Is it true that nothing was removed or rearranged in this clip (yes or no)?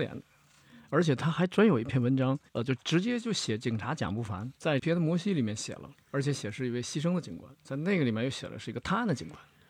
no